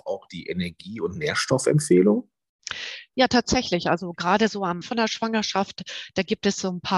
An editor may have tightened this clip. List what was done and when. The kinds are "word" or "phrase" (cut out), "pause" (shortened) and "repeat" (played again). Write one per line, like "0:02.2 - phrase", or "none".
0:04.8 - word